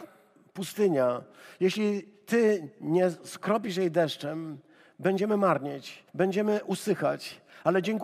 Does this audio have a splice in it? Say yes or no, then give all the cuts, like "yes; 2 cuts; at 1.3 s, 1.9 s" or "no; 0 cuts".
yes; 1 cut; at 6.1 s